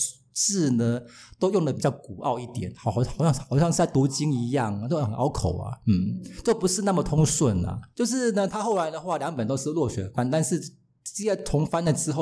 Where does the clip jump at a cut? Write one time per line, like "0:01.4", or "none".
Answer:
none